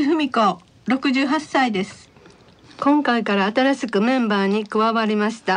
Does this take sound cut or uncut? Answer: uncut